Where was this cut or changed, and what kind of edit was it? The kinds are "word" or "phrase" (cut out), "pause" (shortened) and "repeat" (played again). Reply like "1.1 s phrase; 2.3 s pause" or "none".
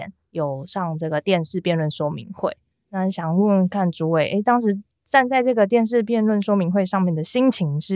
none